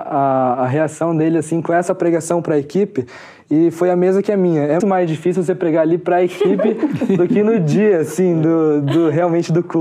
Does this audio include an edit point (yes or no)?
yes